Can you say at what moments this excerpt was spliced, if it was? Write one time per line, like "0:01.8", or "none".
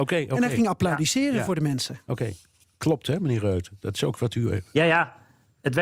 none